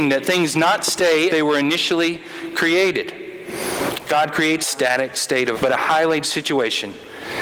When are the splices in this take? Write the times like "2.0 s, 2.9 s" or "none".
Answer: 1.3 s, 4.6 s, 5.5 s, 6.2 s